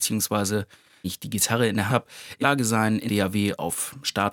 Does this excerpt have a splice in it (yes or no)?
yes